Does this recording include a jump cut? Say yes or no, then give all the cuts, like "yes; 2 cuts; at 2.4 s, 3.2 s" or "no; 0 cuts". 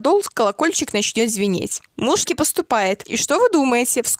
yes; 1 cut; at 2.2 s